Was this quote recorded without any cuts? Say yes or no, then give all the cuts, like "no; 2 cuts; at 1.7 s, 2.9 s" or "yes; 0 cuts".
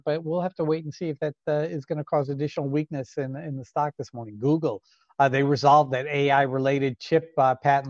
yes; 0 cuts